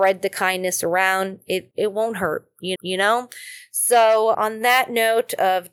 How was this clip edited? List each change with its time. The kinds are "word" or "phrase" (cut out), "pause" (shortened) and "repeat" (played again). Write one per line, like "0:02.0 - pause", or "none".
0:01.7 - word
0:02.8 - repeat
0:04.3 - word